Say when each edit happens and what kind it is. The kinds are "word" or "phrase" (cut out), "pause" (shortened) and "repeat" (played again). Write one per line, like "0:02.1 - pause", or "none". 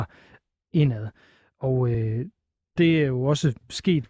none